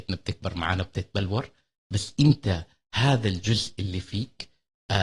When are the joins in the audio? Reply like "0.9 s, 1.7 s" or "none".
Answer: none